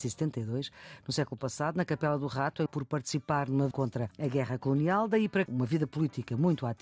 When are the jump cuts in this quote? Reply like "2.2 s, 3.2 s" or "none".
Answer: 2.7 s, 3.7 s, 5.5 s